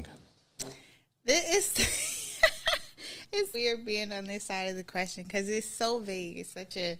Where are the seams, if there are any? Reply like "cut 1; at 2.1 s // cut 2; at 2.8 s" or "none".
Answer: cut 1; at 3.5 s